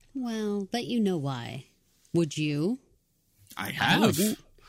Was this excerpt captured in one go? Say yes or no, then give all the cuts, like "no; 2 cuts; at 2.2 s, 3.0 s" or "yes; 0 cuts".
yes; 0 cuts